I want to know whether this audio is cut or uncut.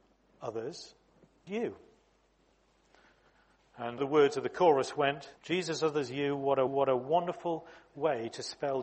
cut